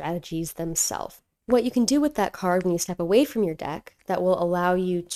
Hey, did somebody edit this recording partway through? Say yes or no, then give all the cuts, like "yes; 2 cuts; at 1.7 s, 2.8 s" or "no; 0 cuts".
no; 0 cuts